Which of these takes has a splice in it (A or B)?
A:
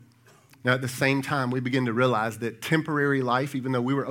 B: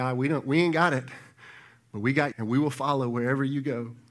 B